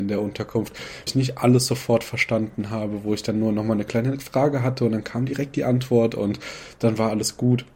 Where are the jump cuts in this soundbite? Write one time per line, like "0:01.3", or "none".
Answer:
0:01.1